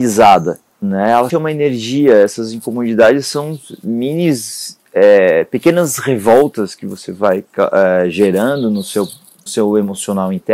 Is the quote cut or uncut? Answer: cut